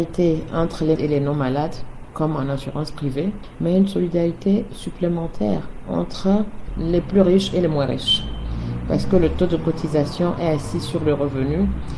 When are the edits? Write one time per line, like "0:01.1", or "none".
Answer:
0:01.0